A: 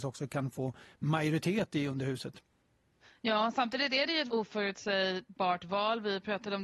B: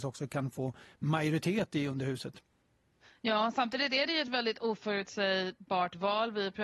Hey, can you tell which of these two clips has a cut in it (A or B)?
A